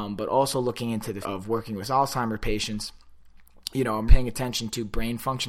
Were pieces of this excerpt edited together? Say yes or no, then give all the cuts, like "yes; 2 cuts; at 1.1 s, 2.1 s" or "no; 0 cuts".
yes; 2 cuts; at 1.2 s, 4.1 s